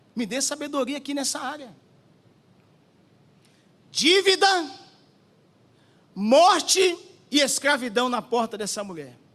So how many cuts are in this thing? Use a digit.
0